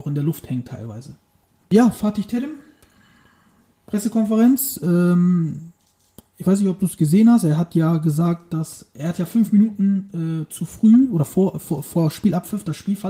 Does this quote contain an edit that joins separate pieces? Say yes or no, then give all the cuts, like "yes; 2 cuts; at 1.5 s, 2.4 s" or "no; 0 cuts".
no; 0 cuts